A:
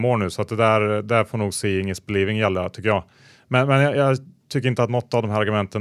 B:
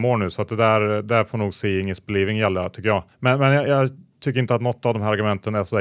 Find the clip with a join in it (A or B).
B